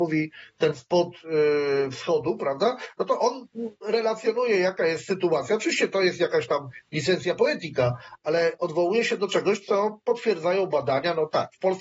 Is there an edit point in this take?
no; 0 cuts

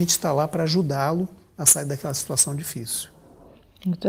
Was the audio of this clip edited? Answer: no; 0 cuts

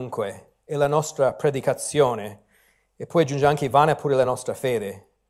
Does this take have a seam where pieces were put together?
no; 0 cuts

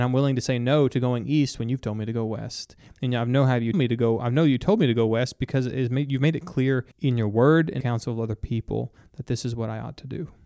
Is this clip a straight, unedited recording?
no; 3 cuts; at 3.7 s, 6.9 s, 7.8 s

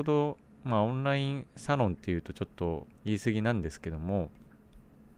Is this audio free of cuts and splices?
no; 1 cut; at 2.9 s

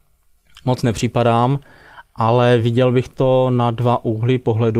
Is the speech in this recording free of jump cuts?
yes; 0 cuts

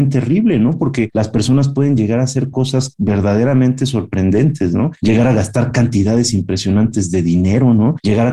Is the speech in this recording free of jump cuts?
yes; 0 cuts

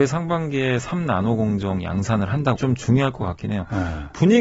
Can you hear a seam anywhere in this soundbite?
yes; 1 cut; at 2.6 s

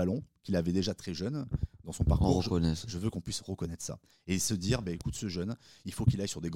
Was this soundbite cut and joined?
no; 0 cuts

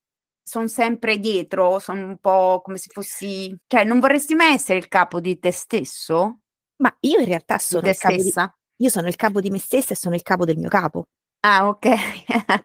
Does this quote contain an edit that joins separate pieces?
yes; 1 cut; at 3.6 s

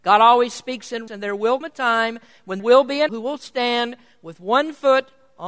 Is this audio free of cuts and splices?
no; 4 cuts; at 1.1 s, 1.6 s, 2.6 s, 3.1 s

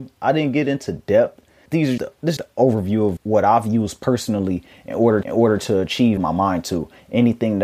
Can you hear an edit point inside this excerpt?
yes; 6 cuts; at 1.7 s, 2.0 s, 2.4 s, 3.2 s, 5.2 s, 6.2 s

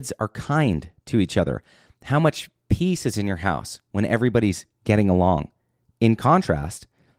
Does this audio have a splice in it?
no; 0 cuts

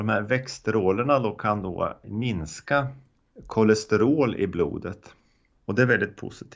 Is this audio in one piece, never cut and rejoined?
yes; 0 cuts

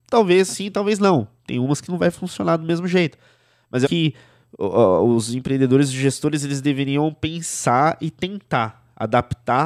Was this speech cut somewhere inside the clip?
yes; 1 cut; at 3.8 s

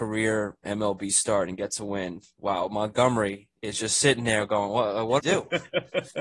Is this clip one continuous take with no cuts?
no; 1 cut; at 5.2 s

